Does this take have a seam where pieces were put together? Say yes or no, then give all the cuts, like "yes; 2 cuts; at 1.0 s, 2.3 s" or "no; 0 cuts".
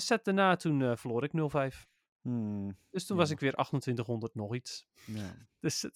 no; 0 cuts